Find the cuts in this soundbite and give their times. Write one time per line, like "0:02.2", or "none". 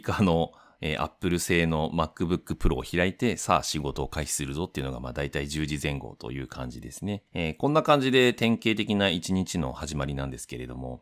0:07.3